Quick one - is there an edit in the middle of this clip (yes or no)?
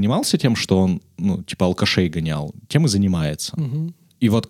no